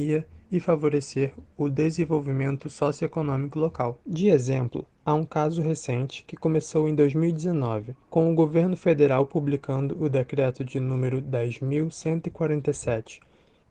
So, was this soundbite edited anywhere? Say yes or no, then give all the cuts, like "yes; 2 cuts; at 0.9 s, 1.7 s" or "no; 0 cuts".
yes; 2 cuts; at 4.0 s, 8.0 s